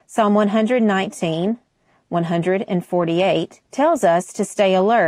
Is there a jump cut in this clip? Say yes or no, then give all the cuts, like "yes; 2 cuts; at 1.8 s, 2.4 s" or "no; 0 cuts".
yes; 1 cut; at 3.6 s